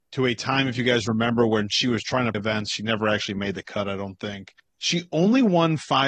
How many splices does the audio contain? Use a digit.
1